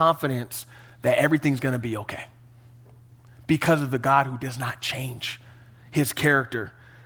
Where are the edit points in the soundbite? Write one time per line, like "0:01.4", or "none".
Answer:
none